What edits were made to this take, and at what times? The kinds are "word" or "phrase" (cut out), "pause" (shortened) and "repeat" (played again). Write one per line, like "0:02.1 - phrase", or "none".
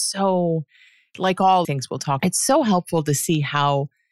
0:01.6 - phrase
0:02.2 - phrase